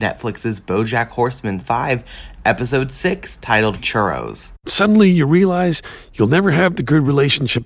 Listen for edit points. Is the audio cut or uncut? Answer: cut